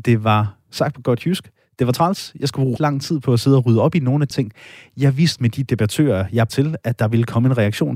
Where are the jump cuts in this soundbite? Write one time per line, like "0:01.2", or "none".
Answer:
0:02.8
0:04.3
0:05.4
0:06.5